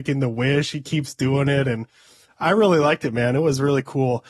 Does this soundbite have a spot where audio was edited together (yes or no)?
no